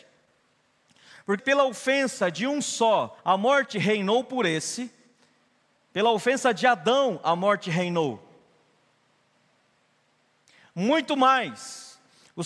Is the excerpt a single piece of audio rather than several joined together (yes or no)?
no